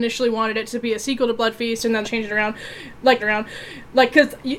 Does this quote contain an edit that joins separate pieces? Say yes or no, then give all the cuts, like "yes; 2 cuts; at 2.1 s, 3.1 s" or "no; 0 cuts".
yes; 2 cuts; at 2.0 s, 3.2 s